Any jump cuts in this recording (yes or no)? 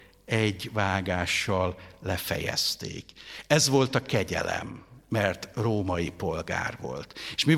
no